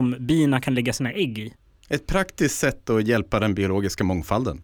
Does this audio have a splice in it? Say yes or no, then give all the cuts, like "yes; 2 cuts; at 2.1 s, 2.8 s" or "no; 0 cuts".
no; 0 cuts